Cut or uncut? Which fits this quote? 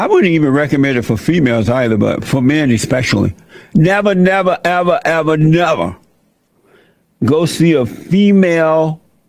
uncut